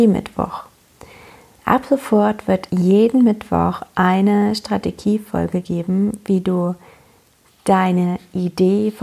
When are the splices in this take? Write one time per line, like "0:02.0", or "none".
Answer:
0:02.7